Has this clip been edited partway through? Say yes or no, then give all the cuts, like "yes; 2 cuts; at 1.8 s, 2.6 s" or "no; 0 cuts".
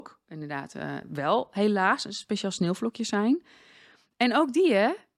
no; 0 cuts